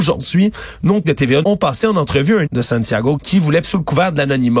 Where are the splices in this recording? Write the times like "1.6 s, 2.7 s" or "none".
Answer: 1.0 s, 1.4 s, 2.5 s, 3.2 s, 3.6 s